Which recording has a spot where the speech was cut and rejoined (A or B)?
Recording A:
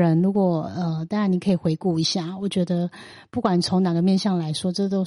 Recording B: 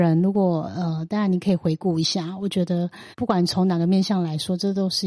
B